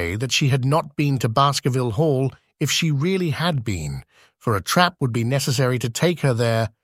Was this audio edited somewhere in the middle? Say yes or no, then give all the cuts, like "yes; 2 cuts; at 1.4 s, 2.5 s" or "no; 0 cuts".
no; 0 cuts